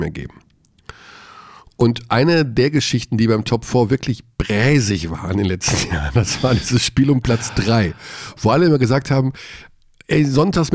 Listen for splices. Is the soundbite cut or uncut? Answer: uncut